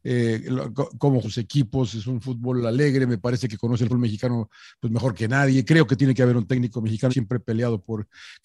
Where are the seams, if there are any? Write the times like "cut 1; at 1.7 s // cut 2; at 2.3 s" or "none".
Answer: cut 1; at 1.2 s // cut 2; at 3.9 s // cut 3; at 7.1 s